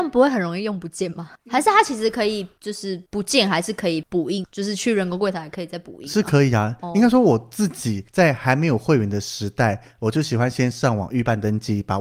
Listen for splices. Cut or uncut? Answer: cut